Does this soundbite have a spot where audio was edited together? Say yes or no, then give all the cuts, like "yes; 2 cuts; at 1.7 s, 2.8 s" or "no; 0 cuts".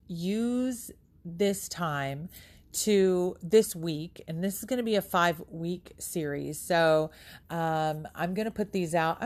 no; 0 cuts